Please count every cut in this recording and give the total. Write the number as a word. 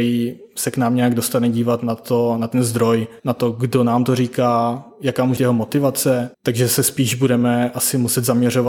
three